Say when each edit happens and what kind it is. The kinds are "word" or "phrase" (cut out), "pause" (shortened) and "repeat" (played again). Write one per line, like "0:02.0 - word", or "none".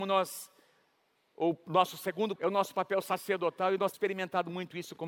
0:02.4 - word
0:03.9 - word